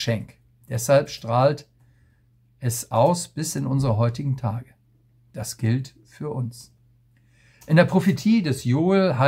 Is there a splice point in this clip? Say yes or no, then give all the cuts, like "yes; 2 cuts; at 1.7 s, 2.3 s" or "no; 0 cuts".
no; 0 cuts